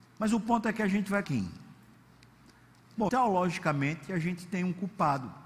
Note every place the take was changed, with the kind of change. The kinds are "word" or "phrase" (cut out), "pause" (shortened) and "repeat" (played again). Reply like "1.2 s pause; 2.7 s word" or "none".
1.2 s word; 3.1 s word